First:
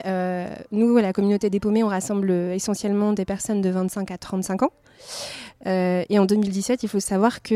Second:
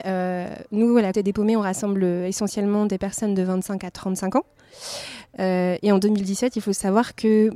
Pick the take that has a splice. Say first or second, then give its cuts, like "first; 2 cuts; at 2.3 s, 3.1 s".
second; 1 cut; at 1.1 s